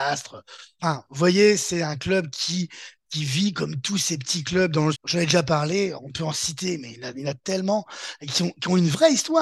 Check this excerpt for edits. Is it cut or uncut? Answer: cut